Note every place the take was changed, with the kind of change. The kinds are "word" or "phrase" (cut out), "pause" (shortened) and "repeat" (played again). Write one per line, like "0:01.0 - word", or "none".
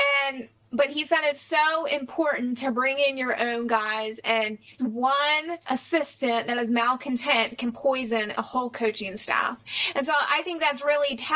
0:04.8 - word
0:05.6 - pause